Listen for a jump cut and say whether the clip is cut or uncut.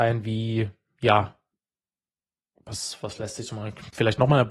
uncut